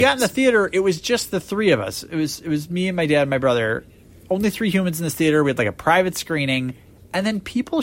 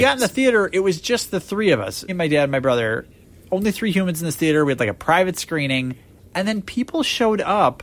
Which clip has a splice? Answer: second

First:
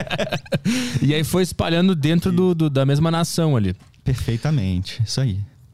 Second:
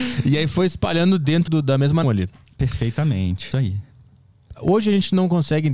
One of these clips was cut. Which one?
second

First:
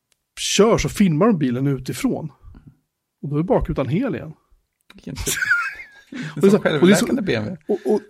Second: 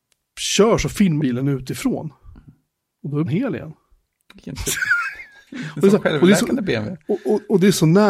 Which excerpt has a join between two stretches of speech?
second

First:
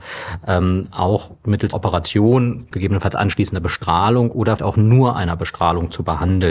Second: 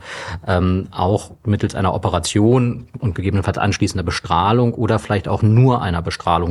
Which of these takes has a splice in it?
first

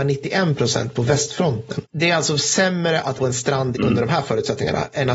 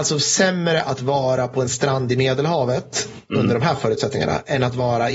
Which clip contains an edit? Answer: first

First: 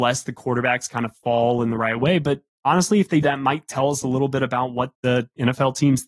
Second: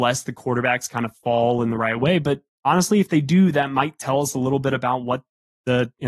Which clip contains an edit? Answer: first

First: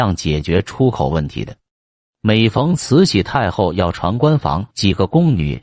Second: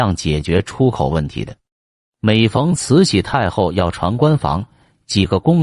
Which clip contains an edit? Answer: first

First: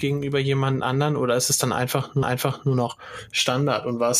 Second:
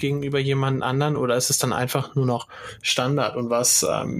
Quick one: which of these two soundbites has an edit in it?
first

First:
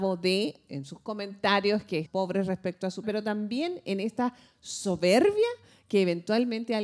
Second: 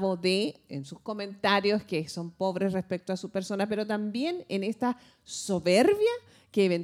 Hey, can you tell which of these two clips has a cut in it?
first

